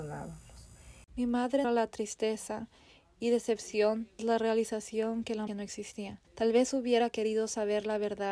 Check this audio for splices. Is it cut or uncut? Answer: cut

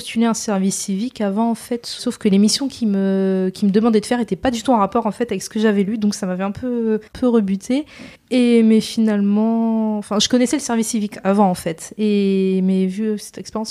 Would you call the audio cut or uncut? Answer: cut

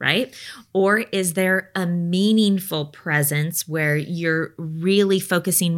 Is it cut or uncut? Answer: uncut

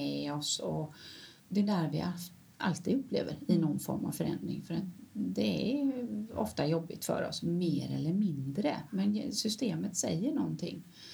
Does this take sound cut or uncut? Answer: cut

